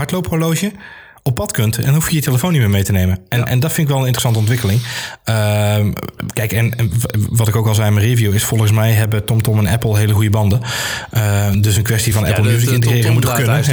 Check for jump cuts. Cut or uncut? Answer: uncut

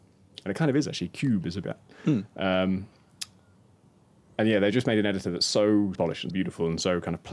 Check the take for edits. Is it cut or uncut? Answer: cut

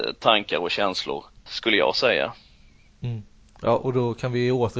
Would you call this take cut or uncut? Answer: cut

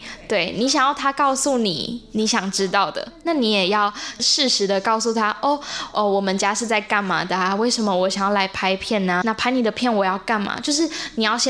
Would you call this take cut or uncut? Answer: cut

